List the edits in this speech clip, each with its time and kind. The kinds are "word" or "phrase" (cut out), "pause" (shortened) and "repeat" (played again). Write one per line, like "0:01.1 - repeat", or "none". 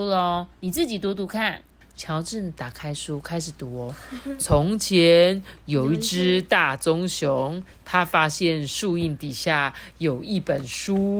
0:01.8 - pause